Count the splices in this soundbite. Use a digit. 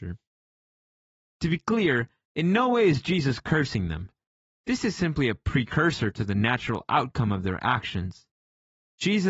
0